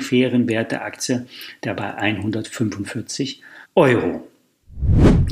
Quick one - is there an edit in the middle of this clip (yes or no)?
yes